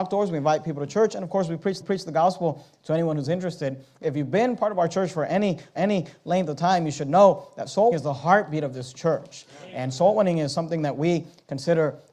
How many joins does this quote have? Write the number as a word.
four